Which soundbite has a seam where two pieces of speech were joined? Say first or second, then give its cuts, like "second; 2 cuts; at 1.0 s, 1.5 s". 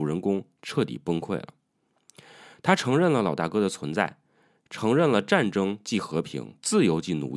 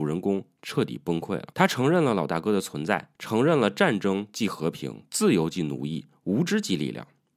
second; 2 cuts; at 1.5 s, 3.2 s